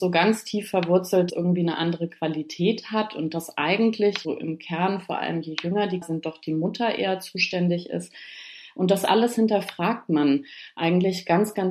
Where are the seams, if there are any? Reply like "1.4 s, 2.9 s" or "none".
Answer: 1.3 s, 4.2 s, 6.0 s